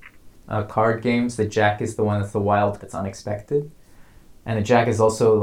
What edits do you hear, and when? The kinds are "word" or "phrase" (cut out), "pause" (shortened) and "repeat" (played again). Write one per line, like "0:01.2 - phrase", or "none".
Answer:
0:02.8 - word

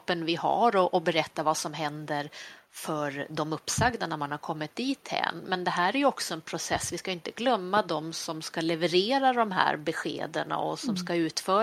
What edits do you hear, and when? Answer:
none

